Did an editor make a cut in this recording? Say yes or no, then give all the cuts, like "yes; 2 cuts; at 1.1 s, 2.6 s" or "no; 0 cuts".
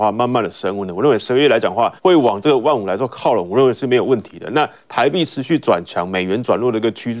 yes; 1 cut; at 2.0 s